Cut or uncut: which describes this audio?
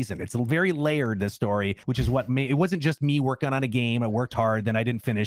cut